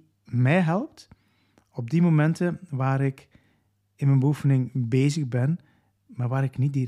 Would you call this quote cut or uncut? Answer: uncut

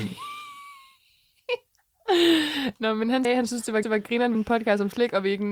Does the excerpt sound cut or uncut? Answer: cut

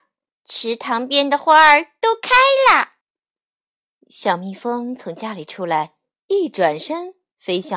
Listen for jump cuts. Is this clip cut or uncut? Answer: cut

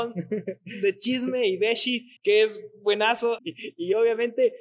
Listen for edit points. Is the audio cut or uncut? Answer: cut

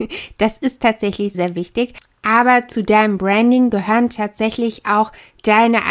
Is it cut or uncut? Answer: cut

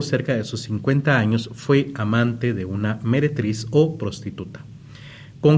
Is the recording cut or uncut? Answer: uncut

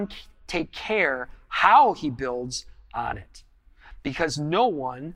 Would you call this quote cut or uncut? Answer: uncut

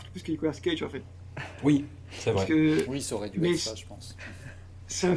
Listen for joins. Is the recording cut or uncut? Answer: uncut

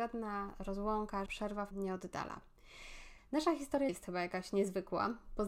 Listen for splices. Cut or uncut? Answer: cut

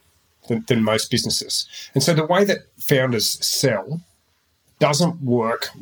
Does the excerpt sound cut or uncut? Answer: uncut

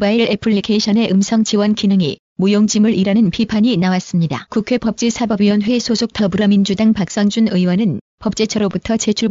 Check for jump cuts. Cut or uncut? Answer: uncut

